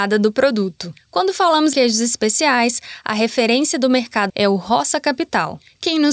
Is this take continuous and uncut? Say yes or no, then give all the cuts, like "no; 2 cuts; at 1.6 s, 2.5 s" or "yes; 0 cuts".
no; 2 cuts; at 1.7 s, 4.3 s